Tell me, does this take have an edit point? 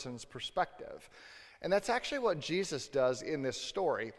no; 0 cuts

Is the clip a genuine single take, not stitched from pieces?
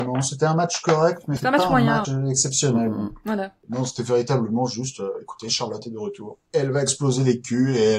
no; 2 cuts; at 1.4 s, 2.0 s

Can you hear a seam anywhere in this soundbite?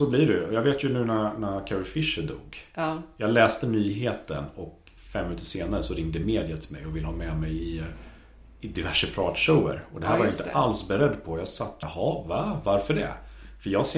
yes; 1 cut; at 11.8 s

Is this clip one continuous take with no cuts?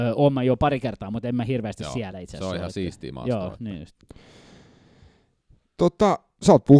yes; 0 cuts

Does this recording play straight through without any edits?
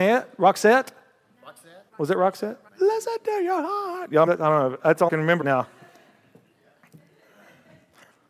no; 5 cuts; at 1.9 s, 2.7 s, 4.3 s, 5.1 s, 5.4 s

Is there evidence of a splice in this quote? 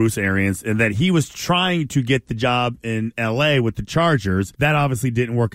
yes; 1 cut; at 4.5 s

